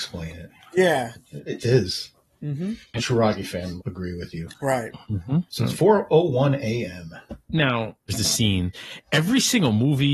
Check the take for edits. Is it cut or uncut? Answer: cut